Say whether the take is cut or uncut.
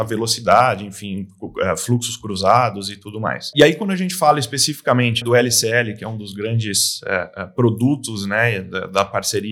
cut